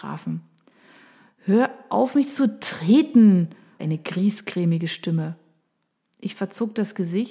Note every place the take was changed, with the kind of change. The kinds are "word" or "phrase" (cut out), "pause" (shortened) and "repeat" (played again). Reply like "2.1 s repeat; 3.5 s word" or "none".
3.8 s word